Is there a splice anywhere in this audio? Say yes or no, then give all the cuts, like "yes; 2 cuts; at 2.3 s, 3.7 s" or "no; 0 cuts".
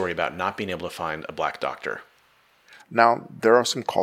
no; 0 cuts